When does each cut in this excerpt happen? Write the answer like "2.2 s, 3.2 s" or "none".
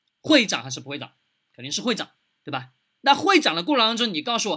none